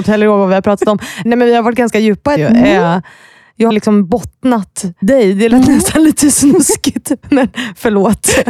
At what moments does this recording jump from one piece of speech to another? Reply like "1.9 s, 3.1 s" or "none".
1.3 s, 2.4 s, 3.7 s, 5.0 s, 7.2 s